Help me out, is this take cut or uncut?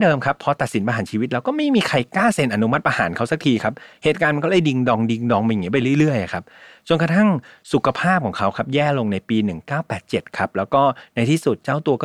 uncut